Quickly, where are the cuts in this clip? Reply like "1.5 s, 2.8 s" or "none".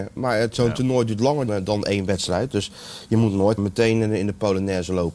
1.5 s, 3.6 s